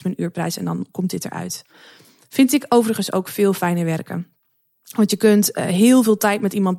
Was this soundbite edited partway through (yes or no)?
no